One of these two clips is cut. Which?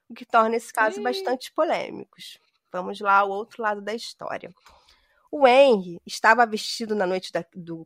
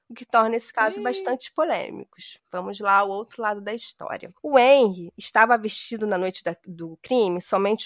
second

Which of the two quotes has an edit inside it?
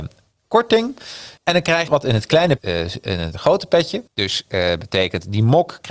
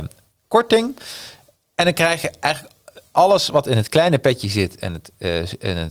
first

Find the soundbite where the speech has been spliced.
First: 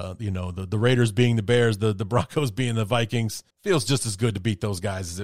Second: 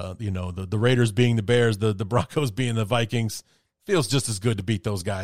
first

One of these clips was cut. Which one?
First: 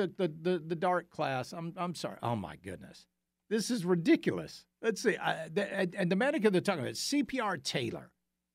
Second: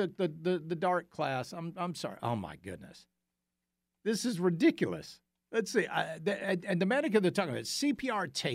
first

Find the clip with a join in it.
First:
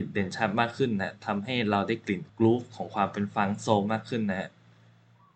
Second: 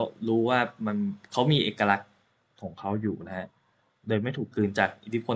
first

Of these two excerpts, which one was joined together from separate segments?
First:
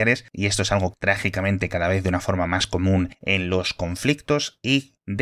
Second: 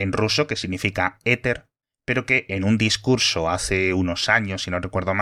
first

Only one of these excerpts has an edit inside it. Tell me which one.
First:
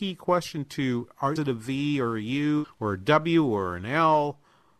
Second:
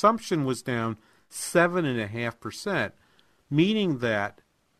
first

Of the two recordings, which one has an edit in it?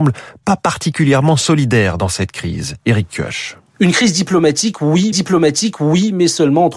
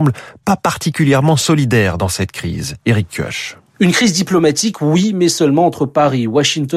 first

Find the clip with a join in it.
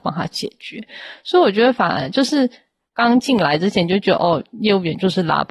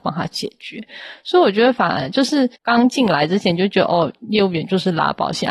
second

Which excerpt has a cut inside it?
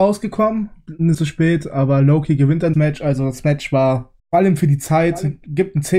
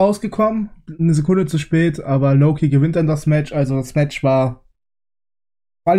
first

